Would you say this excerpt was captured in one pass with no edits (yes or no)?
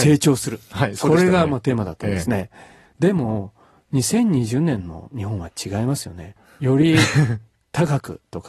yes